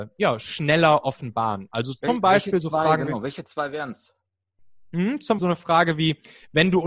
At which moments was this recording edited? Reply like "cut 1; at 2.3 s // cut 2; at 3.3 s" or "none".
cut 1; at 5.4 s

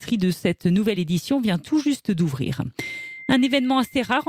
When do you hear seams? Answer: none

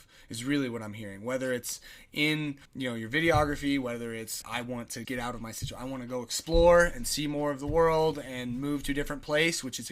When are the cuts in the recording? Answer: cut 1; at 2.7 s // cut 2; at 4.4 s // cut 3; at 5.0 s

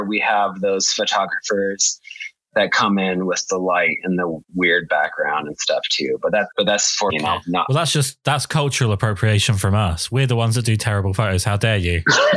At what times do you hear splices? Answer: cut 1; at 4.4 s // cut 2; at 6.5 s // cut 3; at 7.1 s

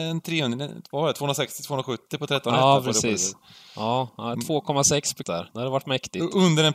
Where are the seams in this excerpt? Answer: cut 1; at 5.2 s

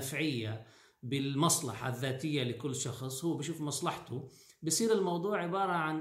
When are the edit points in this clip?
none

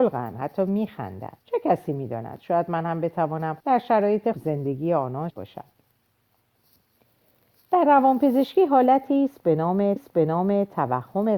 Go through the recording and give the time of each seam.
cut 1; at 1.4 s // cut 2; at 3.6 s // cut 3; at 4.3 s // cut 4; at 5.3 s // cut 5; at 10.0 s

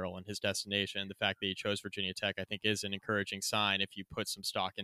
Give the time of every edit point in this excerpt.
none

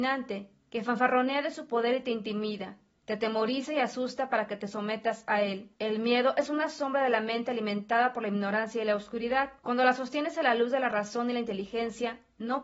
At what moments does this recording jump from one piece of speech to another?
cut 1; at 2.9 s // cut 2; at 5.7 s // cut 3; at 9.6 s

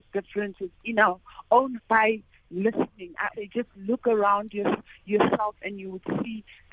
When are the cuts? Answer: cut 1; at 1.8 s // cut 2; at 3.3 s

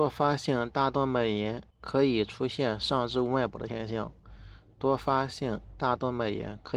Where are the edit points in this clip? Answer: cut 1; at 1.7 s

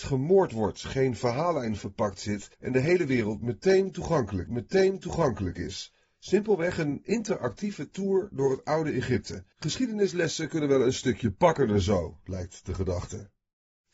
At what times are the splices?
cut 1; at 2.5 s // cut 2; at 4.5 s // cut 3; at 9.5 s

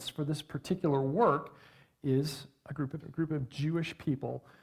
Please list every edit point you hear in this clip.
cut 1; at 3.0 s

